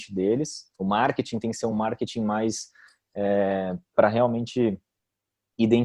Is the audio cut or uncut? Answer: uncut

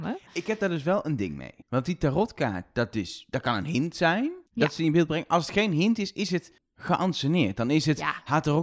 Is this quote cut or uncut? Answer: cut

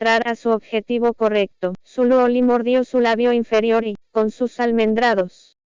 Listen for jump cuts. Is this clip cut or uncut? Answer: cut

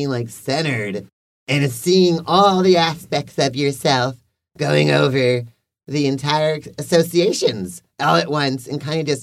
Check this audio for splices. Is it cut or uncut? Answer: uncut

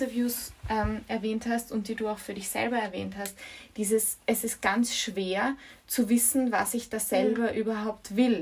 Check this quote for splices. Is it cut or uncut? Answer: uncut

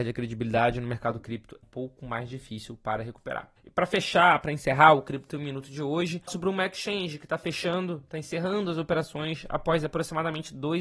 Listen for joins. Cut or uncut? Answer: cut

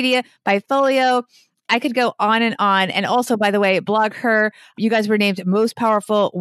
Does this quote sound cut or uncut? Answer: uncut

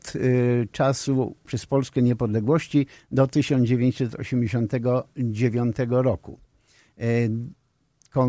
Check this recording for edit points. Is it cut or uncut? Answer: cut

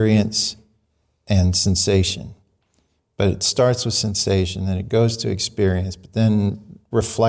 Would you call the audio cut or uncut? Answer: uncut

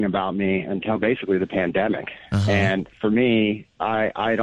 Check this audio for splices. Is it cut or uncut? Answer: uncut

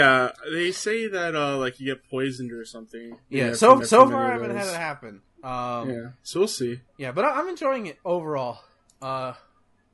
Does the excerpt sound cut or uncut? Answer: cut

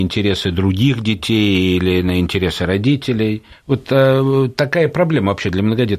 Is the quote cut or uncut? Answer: cut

